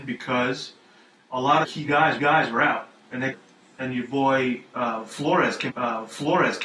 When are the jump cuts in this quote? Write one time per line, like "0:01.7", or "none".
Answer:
0:01.6
0:02.2
0:03.3
0:05.7